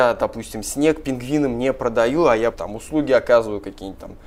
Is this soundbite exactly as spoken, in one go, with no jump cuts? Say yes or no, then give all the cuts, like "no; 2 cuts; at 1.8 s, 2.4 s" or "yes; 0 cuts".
no; 1 cut; at 2.5 s